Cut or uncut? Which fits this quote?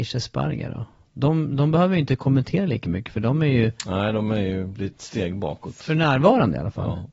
uncut